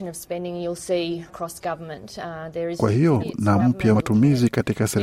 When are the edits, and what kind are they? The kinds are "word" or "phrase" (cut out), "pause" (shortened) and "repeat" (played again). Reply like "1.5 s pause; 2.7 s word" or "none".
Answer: 1.3 s word; 2.8 s word; 3.2 s phrase; 3.6 s word; 3.9 s word